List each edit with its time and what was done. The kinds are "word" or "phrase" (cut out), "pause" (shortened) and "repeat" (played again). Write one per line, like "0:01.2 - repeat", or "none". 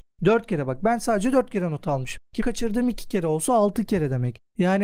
0:02.4 - word